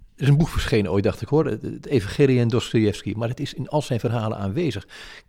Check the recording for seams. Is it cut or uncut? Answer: uncut